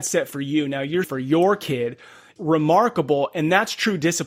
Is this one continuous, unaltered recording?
no; 2 cuts; at 1.0 s, 2.4 s

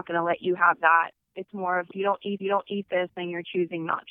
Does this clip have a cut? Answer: yes; 3 cuts; at 1.2 s, 1.9 s, 2.4 s

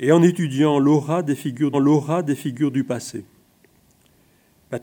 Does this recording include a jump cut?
yes; 1 cut; at 1.7 s

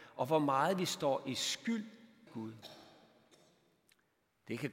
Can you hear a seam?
yes; 1 cut; at 2.3 s

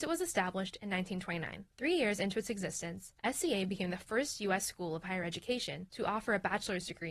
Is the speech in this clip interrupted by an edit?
no; 0 cuts

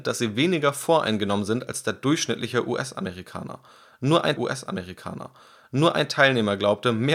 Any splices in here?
yes; 1 cut; at 4.4 s

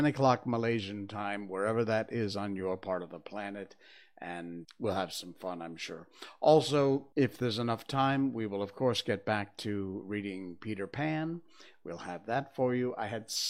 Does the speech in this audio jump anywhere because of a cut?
yes; 2 cuts; at 4.6 s, 7.1 s

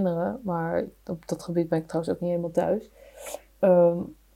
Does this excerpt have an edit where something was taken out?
no; 0 cuts

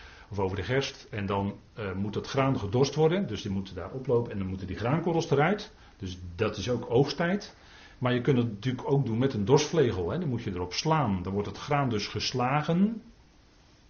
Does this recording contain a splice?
no; 0 cuts

